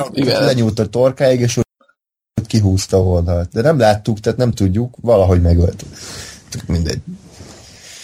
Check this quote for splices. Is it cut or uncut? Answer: uncut